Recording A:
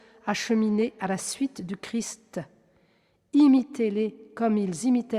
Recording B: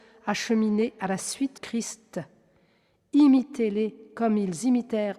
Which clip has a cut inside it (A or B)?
B